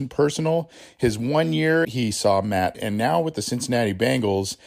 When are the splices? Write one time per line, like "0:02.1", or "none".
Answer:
0:01.8
0:02.7